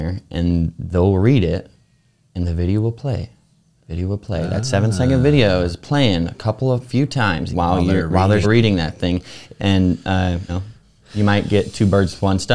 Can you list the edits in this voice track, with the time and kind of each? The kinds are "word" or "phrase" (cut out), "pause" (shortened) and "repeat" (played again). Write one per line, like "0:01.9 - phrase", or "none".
0:07.5 - word
0:08.4 - word
0:10.5 - word